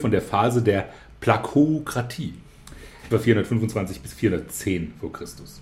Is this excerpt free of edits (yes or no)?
no